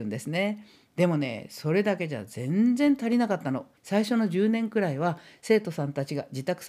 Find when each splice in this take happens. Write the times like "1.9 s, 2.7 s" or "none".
3.8 s

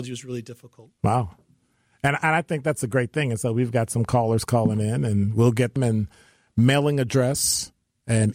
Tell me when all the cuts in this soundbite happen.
5.8 s

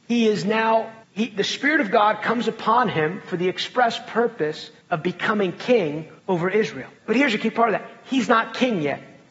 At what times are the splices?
1.0 s, 4.8 s, 6.2 s, 7.0 s

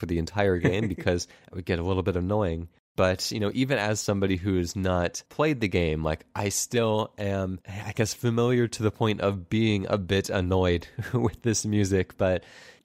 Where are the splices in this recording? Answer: 1.3 s, 5.3 s

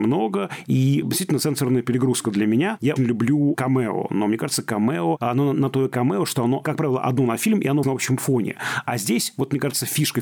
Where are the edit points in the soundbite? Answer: 1.0 s, 3.0 s, 7.8 s

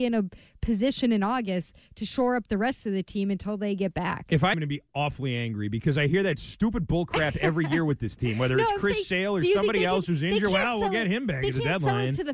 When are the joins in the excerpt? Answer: 4.5 s

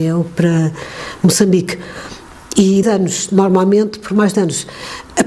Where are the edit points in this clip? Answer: 2.8 s, 4.0 s, 4.3 s

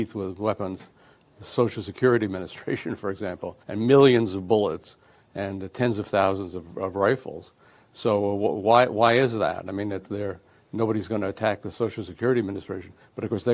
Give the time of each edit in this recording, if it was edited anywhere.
3.6 s

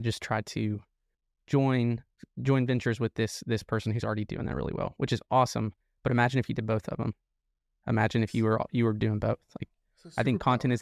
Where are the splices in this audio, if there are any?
none

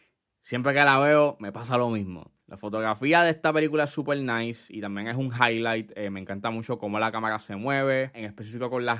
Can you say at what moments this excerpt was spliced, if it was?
2.4 s

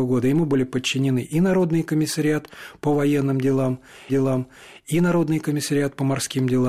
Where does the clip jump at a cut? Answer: 4.1 s

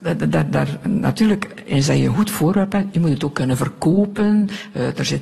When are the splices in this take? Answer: none

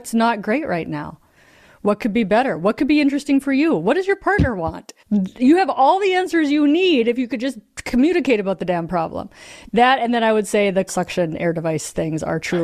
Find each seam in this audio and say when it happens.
5.0 s, 10.9 s

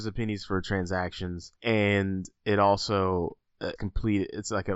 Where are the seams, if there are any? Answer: 1.6 s, 3.8 s

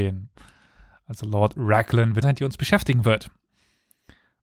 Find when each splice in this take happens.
2.2 s

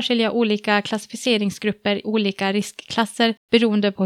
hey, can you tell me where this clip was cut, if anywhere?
2.0 s

